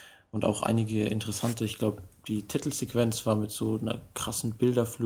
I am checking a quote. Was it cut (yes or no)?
no